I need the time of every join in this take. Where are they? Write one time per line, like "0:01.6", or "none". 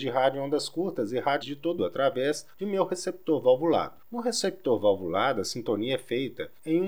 0:01.4
0:01.8

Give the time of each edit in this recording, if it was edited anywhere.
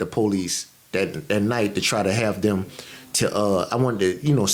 none

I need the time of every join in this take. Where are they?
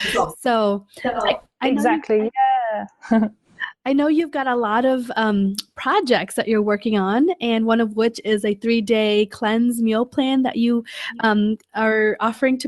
none

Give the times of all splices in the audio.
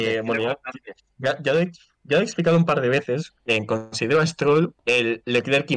none

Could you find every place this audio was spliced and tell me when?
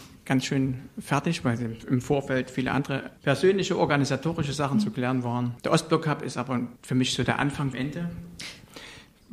0:03.2
0:05.6
0:06.8
0:07.7

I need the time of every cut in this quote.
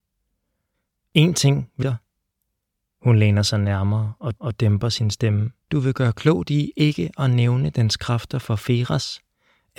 0:01.8
0:04.4
0:05.6

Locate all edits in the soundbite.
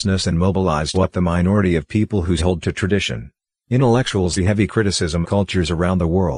0:00.9
0:02.4
0:04.4
0:05.2

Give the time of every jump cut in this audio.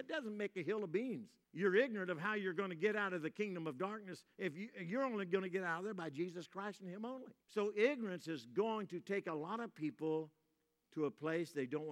0:01.4
0:07.4

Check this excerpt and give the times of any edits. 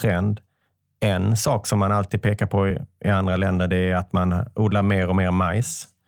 none

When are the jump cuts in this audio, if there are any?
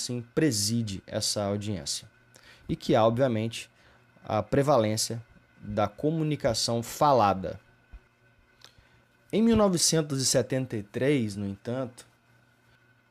none

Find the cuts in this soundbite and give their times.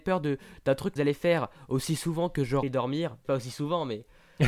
0:01.0
0:02.6
0:03.2

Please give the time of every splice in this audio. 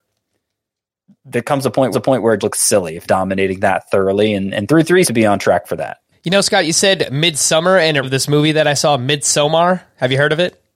0:01.9
0:02.4
0:03.0
0:05.0
0:06.1
0:08.0

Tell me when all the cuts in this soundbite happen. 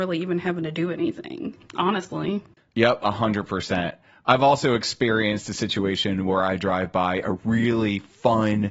none

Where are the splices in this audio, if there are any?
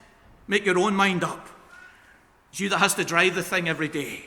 none

